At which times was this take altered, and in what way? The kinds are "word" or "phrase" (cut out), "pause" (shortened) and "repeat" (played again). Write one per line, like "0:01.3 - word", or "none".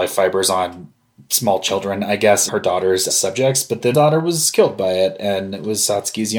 0:02.5 - word
0:03.1 - word
0:03.9 - word